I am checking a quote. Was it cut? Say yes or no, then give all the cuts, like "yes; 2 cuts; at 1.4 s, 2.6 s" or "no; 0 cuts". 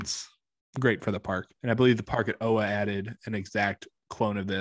yes; 1 cut; at 1.6 s